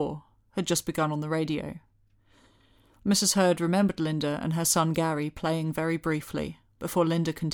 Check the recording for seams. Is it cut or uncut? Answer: uncut